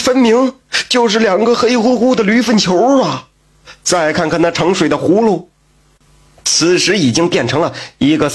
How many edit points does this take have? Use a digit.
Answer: 0